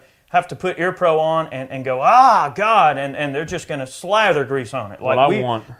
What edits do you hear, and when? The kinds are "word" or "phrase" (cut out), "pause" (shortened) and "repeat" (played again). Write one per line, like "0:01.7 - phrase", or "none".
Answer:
none